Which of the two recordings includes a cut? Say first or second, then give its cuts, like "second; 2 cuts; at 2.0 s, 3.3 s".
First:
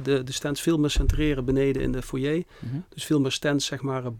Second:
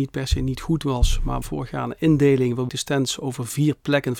second; 2 cuts; at 1.4 s, 2.7 s